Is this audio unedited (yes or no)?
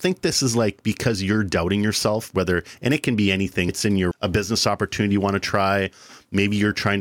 no